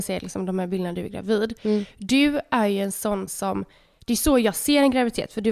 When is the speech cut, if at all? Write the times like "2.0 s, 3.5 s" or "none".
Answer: 3.3 s